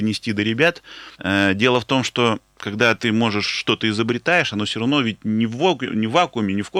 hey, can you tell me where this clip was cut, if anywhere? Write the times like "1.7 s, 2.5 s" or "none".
1.1 s